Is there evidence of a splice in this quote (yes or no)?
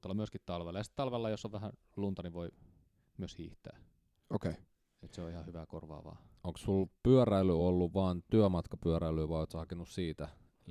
no